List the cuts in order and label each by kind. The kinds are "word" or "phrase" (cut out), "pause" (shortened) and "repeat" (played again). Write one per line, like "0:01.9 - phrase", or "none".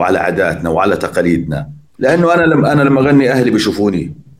0:01.9 - pause